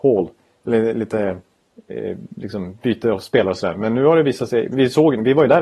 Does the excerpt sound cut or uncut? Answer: uncut